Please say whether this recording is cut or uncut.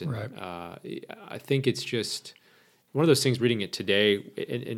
uncut